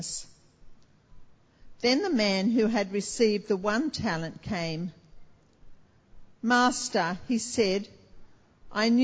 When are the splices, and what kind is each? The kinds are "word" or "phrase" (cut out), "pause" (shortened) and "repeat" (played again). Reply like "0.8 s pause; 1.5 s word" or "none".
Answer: none